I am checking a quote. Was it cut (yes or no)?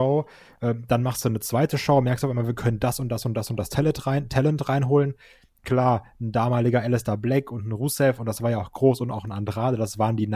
no